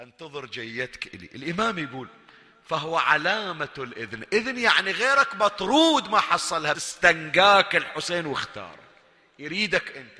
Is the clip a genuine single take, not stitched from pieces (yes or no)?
no